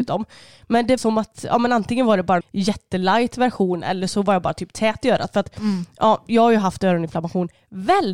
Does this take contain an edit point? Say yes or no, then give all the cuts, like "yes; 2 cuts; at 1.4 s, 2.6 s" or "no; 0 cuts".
yes; 2 cuts; at 1.0 s, 2.4 s